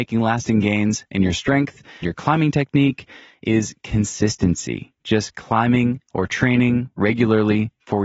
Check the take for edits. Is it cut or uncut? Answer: cut